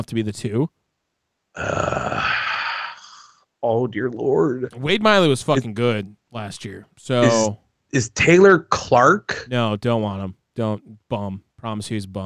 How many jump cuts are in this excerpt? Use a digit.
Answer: 0